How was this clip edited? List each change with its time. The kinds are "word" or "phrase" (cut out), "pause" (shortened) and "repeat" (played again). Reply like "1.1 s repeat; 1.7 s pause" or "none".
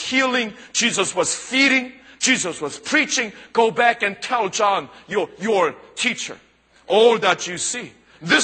none